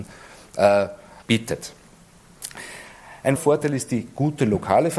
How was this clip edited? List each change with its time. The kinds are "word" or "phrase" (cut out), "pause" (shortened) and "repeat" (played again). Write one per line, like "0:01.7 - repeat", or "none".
0:01.2 - pause
0:03.4 - word